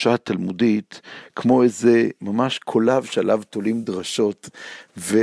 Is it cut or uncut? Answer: uncut